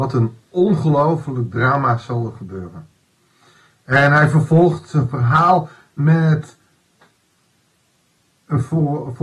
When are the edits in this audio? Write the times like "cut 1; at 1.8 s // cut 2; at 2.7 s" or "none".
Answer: none

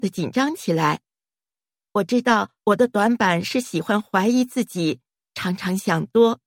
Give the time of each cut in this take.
cut 1; at 2.6 s

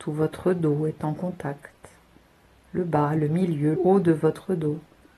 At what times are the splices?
cut 1; at 3.8 s

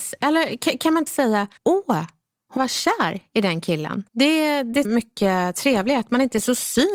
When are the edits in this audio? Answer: cut 1; at 1.1 s // cut 2; at 1.6 s // cut 3; at 2.6 s // cut 4; at 4.1 s // cut 5; at 4.8 s

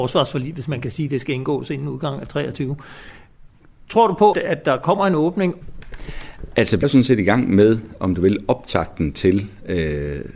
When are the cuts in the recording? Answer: cut 1; at 4.3 s // cut 2; at 6.8 s

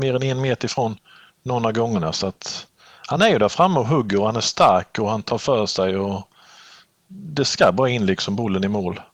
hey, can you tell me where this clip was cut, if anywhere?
none

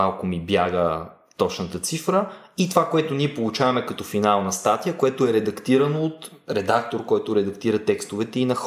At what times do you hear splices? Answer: none

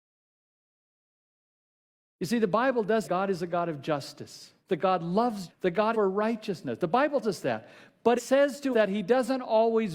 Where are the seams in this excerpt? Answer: cut 1; at 3.0 s // cut 2; at 4.6 s // cut 3; at 5.5 s // cut 4; at 5.9 s // cut 5; at 7.2 s // cut 6; at 8.2 s // cut 7; at 8.7 s

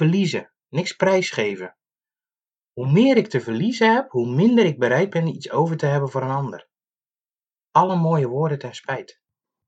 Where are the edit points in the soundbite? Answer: none

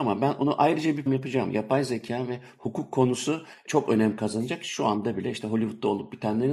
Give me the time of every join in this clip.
cut 1; at 1.1 s

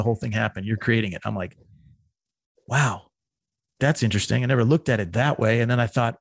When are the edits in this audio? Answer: cut 1; at 3.8 s

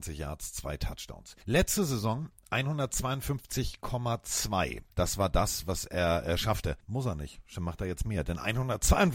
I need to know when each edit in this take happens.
cut 1; at 1.4 s // cut 2; at 6.8 s

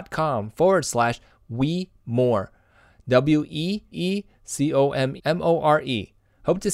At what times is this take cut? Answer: cut 1; at 2.0 s // cut 2; at 3.9 s // cut 3; at 5.2 s

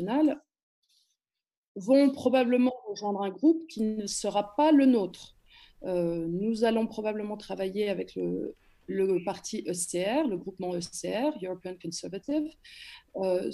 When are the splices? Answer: none

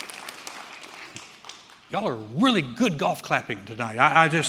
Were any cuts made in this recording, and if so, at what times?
none

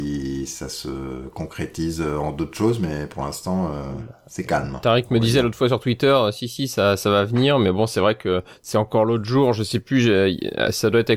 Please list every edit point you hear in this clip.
none

